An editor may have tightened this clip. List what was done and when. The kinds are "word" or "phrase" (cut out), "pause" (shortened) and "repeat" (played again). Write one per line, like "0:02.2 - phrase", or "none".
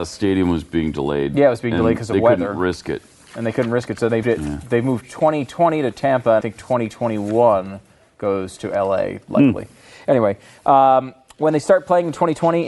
0:04.2 - word
0:06.4 - word